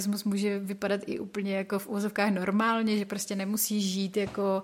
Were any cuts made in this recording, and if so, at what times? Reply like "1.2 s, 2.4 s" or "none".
none